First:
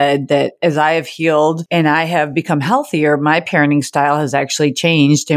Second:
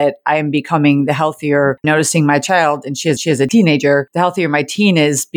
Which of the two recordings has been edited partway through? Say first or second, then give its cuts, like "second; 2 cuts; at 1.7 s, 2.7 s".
second; 2 cuts; at 1.8 s, 3.2 s